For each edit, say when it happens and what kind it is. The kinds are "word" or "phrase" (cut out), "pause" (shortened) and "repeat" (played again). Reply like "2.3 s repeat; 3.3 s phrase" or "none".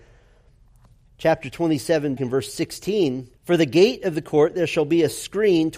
2.2 s word; 3.4 s pause